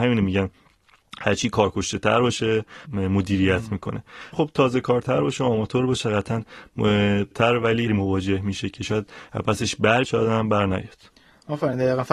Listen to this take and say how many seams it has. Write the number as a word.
five